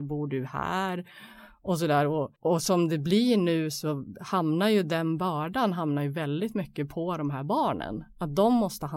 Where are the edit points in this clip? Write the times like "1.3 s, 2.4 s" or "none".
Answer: 2.4 s